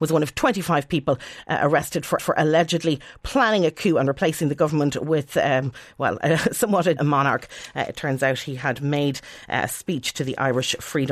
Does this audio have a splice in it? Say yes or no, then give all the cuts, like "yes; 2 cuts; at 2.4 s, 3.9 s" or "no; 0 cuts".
yes; 2 cuts; at 2.2 s, 7.0 s